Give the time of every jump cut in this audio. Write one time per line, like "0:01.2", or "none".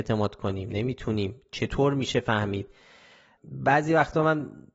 none